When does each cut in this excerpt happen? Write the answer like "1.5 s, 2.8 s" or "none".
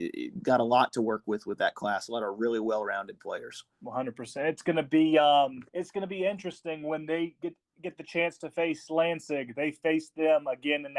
3.7 s, 5.7 s